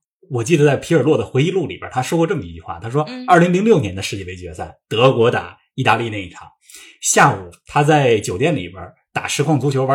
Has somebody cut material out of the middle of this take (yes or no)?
no